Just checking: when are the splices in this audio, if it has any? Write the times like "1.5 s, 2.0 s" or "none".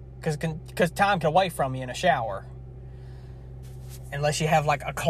1.2 s